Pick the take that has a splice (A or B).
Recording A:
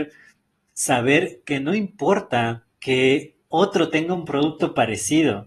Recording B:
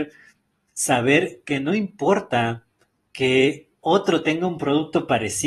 A